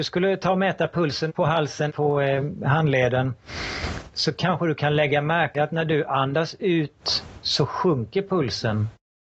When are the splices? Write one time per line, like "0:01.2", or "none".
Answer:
0:01.3
0:01.9
0:05.5